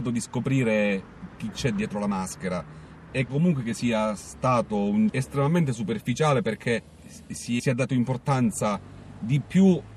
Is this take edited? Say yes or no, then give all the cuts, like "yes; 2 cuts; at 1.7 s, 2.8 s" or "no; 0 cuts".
yes; 3 cuts; at 3.3 s, 5.1 s, 7.6 s